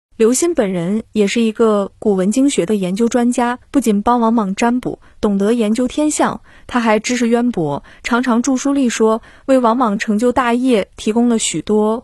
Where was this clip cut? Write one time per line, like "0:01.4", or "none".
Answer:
0:03.6